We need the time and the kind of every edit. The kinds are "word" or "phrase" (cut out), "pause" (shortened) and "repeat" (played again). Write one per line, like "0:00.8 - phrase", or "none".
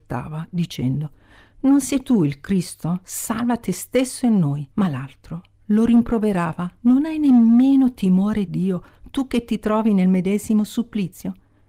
0:04.7 - pause
0:08.5 - word